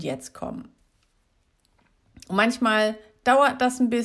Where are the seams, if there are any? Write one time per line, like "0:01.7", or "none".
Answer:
none

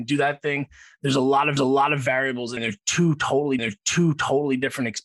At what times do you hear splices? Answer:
0:01.6
0:02.6
0:03.6

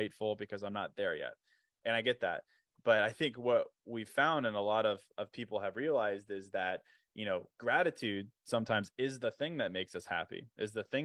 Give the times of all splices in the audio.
none

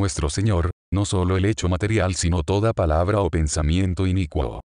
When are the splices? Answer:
none

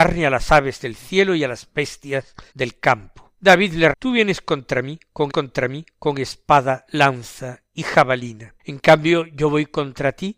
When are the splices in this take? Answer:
0:02.5
0:03.4
0:03.9
0:05.3
0:08.6

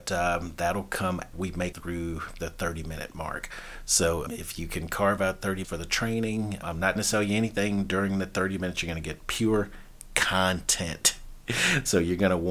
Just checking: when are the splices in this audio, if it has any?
0:01.3
0:01.7
0:04.3
0:05.6
0:06.6
0:07.0

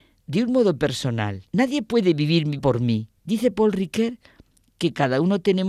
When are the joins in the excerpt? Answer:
0:01.5
0:02.6
0:03.2

